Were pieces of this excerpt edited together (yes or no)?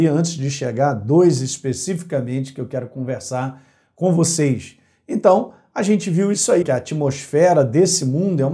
yes